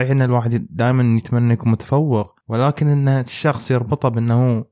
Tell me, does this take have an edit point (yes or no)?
no